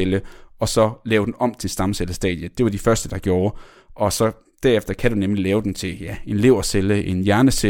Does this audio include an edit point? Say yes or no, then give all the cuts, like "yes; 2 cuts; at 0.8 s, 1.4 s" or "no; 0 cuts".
no; 0 cuts